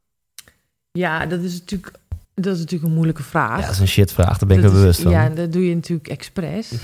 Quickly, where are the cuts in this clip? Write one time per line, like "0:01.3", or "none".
0:02.2